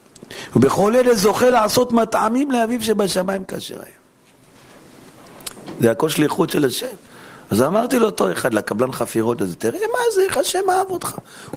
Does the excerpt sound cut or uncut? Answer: uncut